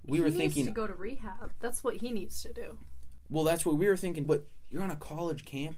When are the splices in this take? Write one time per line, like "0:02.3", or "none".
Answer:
0:04.2